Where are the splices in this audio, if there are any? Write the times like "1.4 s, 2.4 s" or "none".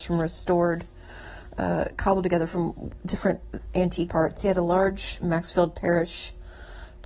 4.1 s